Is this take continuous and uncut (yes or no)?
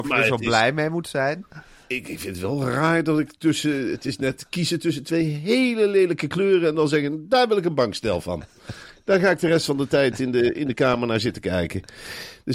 yes